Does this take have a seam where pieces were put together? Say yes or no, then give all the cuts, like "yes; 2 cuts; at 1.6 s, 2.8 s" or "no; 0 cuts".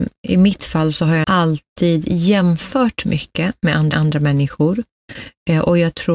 yes; 3 cuts; at 1.2 s, 3.0 s, 3.9 s